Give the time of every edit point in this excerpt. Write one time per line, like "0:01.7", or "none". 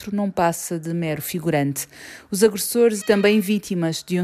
0:03.0